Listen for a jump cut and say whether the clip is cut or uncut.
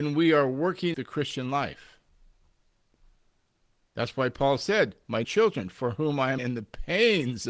cut